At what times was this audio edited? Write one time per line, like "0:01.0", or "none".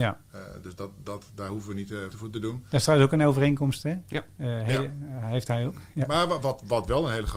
0:02.1